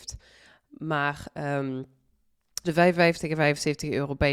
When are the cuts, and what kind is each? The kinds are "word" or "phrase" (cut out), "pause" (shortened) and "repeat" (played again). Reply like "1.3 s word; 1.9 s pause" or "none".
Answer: 2.6 s word